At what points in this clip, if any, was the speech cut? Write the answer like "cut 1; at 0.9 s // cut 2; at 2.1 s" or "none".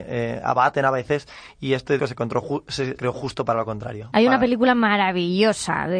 cut 1; at 2.0 s // cut 2; at 3.0 s